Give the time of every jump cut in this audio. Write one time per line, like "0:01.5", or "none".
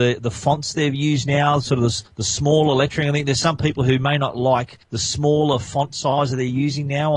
0:02.1
0:04.8